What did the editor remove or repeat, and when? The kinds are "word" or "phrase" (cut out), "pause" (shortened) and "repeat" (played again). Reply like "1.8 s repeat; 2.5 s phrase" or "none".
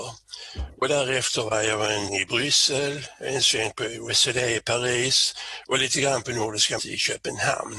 2.1 s word; 6.8 s word